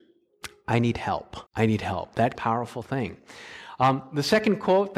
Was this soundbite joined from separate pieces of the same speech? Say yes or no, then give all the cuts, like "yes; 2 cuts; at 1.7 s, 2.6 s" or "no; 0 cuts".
yes; 2 cuts; at 1.5 s, 2.4 s